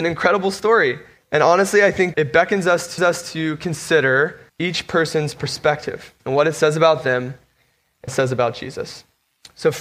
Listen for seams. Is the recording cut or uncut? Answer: cut